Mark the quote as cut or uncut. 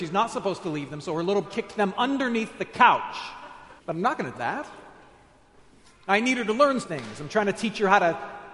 cut